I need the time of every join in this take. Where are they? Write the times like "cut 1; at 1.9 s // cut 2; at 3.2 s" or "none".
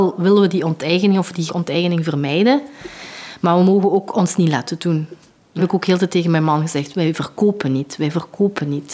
cut 1; at 1.5 s // cut 2; at 5.6 s